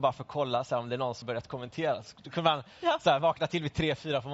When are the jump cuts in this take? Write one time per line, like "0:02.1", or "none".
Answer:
0:01.2